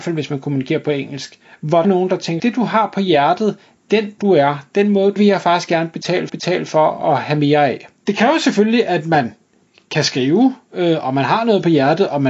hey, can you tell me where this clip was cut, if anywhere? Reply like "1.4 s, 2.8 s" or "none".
1.4 s, 1.8 s, 2.4 s, 4.2 s, 5.2 s, 6.3 s, 8.0 s